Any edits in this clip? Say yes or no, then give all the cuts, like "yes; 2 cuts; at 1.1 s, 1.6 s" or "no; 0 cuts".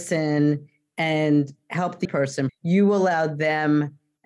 yes; 2 cuts; at 2.0 s, 2.5 s